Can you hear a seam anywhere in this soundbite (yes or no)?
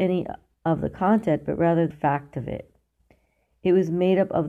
yes